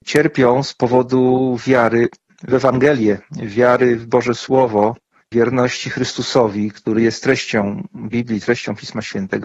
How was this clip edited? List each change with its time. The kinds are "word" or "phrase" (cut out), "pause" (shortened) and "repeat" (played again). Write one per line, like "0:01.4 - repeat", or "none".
none